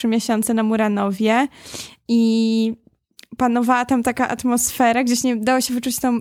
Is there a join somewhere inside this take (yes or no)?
no